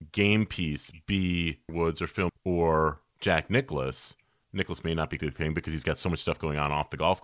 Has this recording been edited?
yes; 3 cuts; at 1.7 s, 2.3 s, 5.2 s

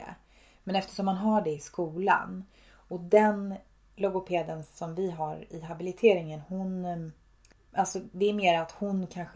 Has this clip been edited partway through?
no; 0 cuts

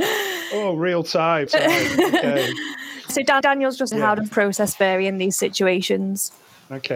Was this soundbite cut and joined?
yes; 5 cuts; at 1.5 s, 3.1 s, 3.4 s, 3.9 s, 4.3 s

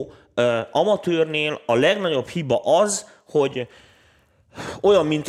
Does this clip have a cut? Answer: no; 0 cuts

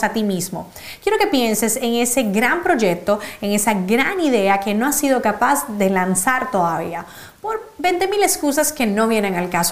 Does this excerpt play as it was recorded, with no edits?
yes; 0 cuts

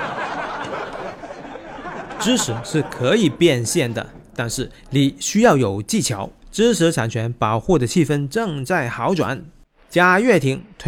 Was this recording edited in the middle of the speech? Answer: yes; 2 cuts; at 4.8 s, 6.4 s

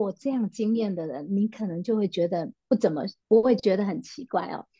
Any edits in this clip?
yes; 1 cut; at 3.2 s

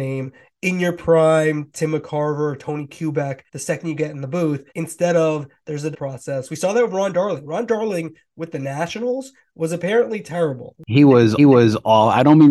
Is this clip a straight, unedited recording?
no; 4 cuts; at 3.5 s, 4.7 s, 5.9 s, 11.4 s

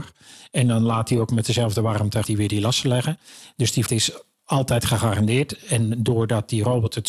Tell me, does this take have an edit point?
yes; 2 cuts; at 2.2 s, 3.9 s

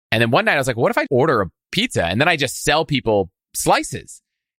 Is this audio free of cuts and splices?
no; 1 cut; at 1.1 s

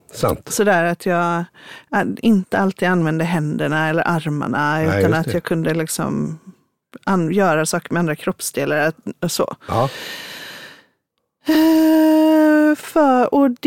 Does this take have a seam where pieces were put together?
no; 0 cuts

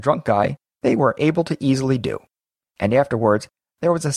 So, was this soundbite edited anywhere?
no; 0 cuts

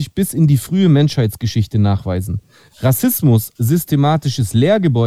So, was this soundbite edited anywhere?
yes; 1 cut; at 3.6 s

